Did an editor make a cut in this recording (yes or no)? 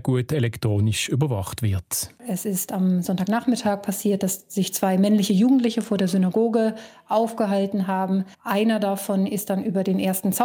yes